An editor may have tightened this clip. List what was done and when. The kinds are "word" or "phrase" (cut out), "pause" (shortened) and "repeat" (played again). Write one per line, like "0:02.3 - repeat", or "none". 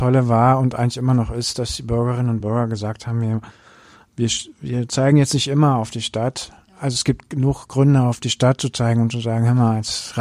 none